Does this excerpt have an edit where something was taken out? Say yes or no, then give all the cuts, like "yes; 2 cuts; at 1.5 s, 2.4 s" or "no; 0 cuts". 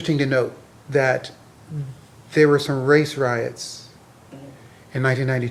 no; 0 cuts